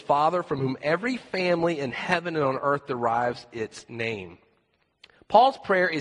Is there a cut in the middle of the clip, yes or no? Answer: no